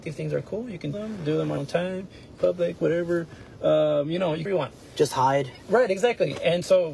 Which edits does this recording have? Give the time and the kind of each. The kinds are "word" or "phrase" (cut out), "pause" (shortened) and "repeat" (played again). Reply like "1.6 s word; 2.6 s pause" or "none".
0.9 s word; 1.6 s word; 2.4 s phrase; 4.5 s phrase